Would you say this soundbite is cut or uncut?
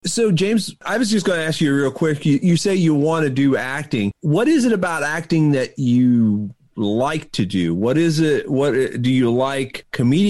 uncut